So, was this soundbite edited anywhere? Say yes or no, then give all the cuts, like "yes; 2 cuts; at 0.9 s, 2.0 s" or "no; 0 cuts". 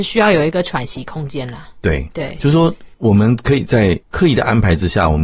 yes; 2 cuts; at 2.9 s, 4.0 s